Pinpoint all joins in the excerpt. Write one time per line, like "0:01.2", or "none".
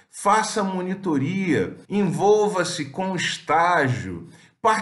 0:01.8